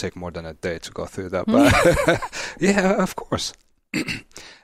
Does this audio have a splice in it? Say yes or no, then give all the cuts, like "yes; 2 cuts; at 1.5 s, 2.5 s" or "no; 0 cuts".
no; 0 cuts